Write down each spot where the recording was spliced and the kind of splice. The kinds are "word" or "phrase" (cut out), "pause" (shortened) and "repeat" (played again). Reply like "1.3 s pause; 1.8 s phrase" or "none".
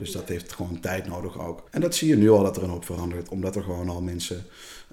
1.7 s pause